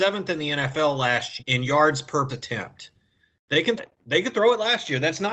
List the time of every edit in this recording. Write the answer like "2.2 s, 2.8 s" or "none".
1.4 s, 2.3 s, 3.8 s